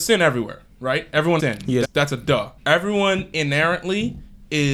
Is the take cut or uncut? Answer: cut